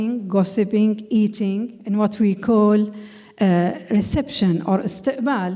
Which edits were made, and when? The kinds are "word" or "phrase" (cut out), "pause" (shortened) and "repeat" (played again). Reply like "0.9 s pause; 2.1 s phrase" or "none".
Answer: none